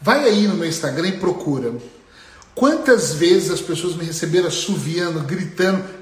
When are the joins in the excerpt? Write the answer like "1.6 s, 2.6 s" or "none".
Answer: none